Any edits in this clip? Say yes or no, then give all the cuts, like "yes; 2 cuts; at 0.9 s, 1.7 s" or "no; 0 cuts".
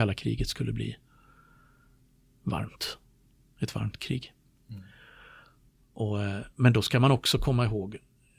no; 0 cuts